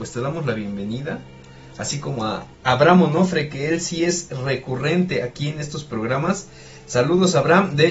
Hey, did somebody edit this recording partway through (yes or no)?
yes